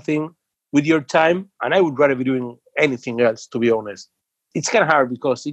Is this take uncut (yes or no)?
yes